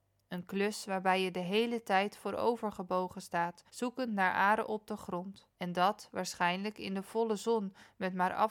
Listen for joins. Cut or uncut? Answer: cut